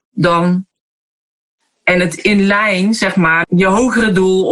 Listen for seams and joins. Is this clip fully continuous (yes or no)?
no